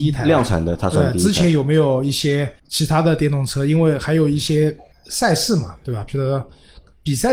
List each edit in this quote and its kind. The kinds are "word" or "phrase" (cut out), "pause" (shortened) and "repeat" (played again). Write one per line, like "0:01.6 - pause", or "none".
0:02.6 - pause
0:04.9 - pause